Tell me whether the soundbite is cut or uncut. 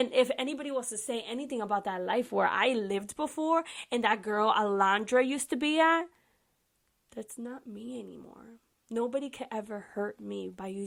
uncut